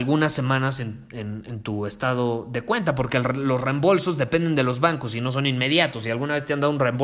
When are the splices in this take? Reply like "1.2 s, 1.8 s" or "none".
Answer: none